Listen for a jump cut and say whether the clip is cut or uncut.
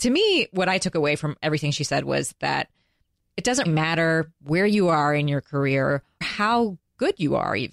cut